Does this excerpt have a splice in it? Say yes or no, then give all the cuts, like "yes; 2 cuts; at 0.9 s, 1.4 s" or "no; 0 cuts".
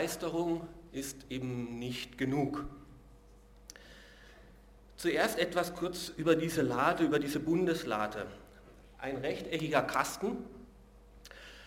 no; 0 cuts